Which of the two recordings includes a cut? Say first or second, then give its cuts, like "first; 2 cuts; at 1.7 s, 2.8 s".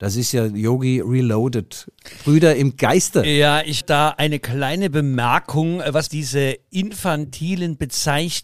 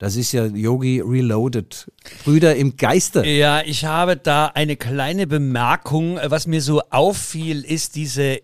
first; 2 cuts; at 3.8 s, 6.1 s